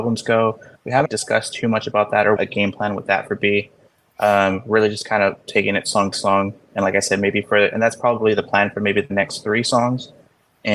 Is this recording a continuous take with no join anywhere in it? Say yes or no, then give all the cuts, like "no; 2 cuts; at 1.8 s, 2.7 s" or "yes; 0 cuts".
no; 3 cuts; at 1.1 s, 2.4 s, 6.1 s